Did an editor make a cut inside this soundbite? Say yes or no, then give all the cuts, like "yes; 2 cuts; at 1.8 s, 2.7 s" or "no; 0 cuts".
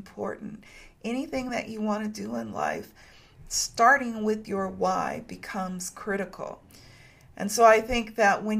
no; 0 cuts